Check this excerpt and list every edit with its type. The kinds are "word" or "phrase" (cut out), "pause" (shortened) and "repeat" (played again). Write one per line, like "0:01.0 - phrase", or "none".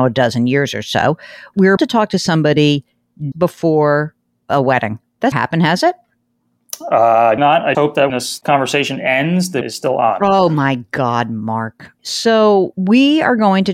0:01.8 - word
0:03.3 - word
0:05.3 - word
0:07.4 - word
0:07.7 - word
0:08.1 - word
0:09.6 - word
0:12.7 - word